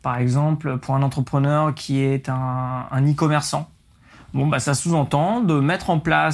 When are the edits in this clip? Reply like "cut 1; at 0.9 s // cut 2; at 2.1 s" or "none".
none